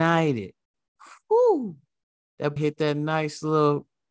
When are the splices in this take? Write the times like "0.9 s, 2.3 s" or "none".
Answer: 2.6 s